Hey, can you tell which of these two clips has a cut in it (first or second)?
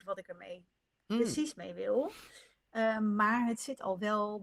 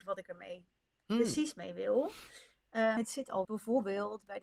second